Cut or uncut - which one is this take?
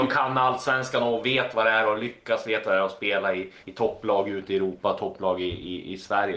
cut